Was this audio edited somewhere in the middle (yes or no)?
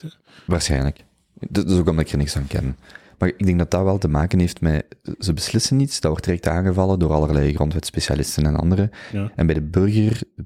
no